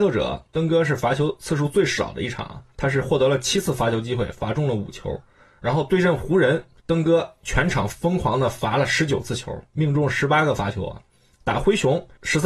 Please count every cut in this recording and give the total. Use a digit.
0